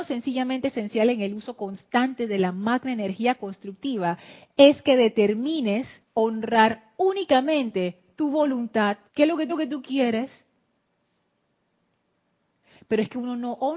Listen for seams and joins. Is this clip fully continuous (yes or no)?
no